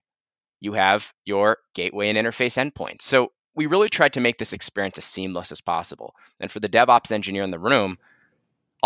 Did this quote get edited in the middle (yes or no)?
no